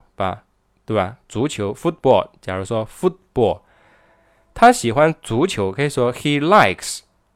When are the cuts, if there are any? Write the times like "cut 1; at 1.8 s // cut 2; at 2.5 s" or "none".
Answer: none